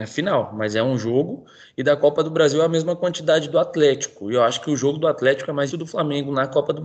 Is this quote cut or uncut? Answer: cut